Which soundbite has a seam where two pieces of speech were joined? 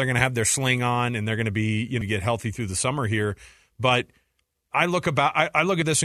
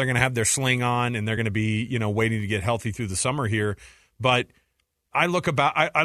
first; 1 cut; at 2.0 s

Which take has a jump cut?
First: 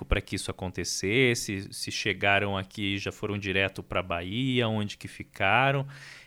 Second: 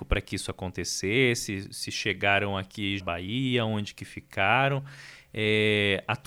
second; 1 cut; at 3.0 s

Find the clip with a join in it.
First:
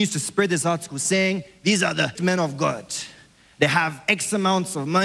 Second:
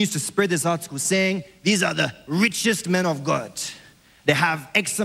first; 1 cut; at 2.2 s

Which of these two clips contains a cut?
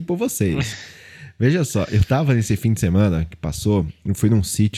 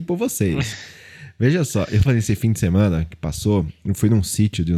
second; 1 cut; at 2.1 s

